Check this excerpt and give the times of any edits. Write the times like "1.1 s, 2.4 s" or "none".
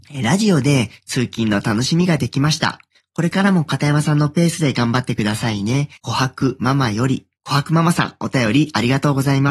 2.9 s, 6.0 s, 7.4 s

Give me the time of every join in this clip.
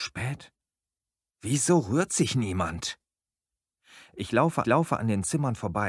4.6 s

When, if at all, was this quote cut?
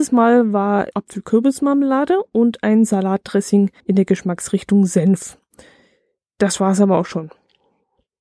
0.9 s, 3.8 s

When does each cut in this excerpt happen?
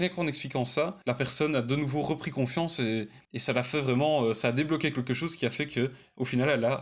1.0 s, 3.2 s

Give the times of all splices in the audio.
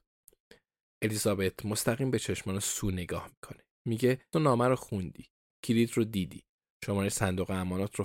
4.3 s

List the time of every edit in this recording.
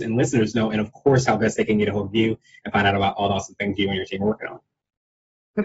none

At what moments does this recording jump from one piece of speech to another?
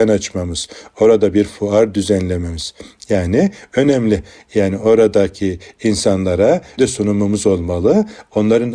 6.8 s

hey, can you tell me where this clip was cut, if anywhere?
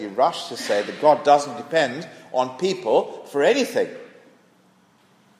none

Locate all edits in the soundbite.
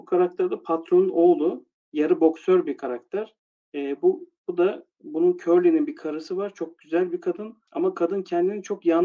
3.5 s, 7.7 s

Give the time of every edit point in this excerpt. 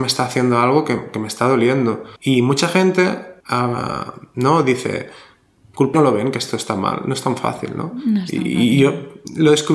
2.2 s, 3.4 s, 5.9 s

